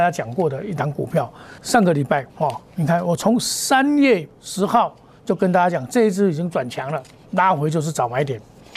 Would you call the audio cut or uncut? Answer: cut